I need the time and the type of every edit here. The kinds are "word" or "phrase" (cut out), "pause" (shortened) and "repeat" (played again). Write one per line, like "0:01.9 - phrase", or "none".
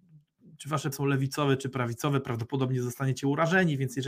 0:00.9 - word